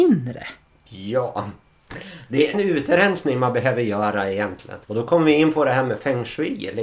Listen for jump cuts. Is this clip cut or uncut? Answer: cut